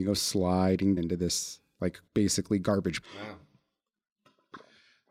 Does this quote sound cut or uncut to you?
cut